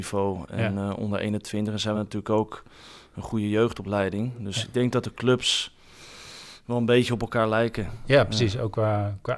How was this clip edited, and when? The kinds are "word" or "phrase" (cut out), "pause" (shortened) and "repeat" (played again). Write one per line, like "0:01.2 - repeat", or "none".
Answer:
none